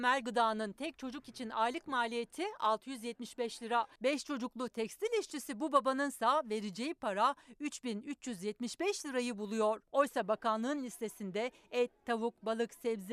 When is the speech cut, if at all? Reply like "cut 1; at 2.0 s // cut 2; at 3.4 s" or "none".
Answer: none

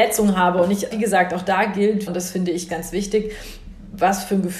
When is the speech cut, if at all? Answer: cut 1; at 0.9 s // cut 2; at 2.1 s // cut 3; at 2.7 s

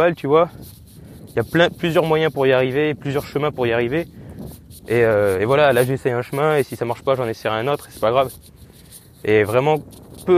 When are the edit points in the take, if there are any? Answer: none

